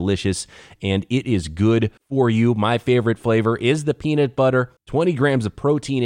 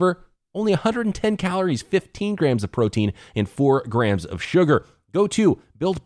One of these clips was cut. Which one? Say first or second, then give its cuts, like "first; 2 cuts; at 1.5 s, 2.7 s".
first; 2 cuts; at 2.0 s, 4.8 s